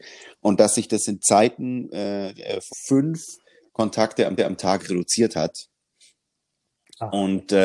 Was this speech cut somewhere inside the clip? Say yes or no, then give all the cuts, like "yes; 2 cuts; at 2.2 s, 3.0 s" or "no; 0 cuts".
yes; 2 cuts; at 2.7 s, 4.4 s